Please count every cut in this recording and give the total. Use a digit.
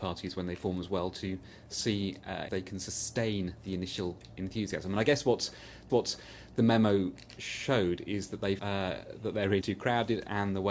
4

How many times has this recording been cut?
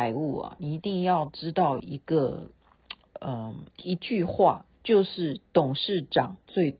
2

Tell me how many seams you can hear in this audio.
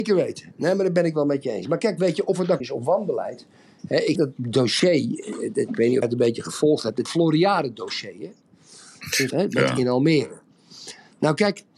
5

